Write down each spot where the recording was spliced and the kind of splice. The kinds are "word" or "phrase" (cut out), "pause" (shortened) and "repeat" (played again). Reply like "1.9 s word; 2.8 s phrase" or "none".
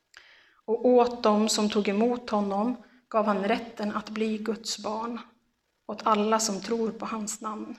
none